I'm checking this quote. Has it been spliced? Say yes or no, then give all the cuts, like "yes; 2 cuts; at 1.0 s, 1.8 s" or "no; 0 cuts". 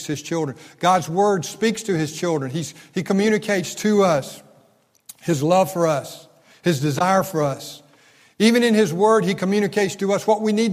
no; 0 cuts